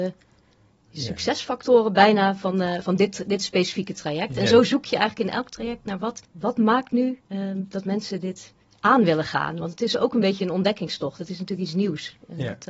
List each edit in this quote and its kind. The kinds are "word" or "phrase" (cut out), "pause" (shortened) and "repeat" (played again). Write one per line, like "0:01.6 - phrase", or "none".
0:06.2 - pause
0:07.2 - pause
0:08.7 - pause